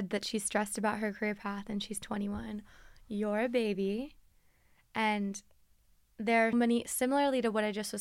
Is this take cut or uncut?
cut